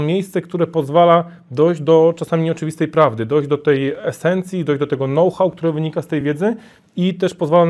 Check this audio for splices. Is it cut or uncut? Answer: uncut